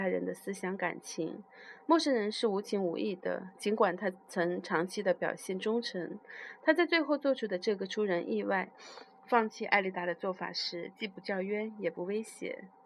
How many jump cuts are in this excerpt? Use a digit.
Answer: 0